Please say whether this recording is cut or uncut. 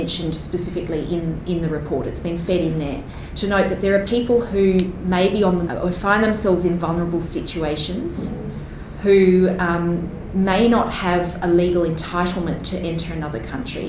cut